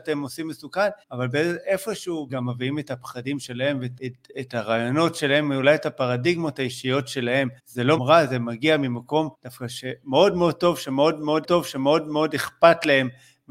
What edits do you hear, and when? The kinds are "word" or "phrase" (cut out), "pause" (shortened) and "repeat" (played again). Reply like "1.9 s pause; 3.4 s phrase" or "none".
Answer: 1.0 s pause; 2.3 s phrase; 4.0 s word; 7.6 s pause; 8.0 s phrase; 9.3 s pause; 11.4 s repeat